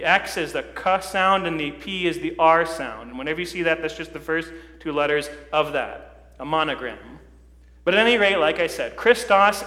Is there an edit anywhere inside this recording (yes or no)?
no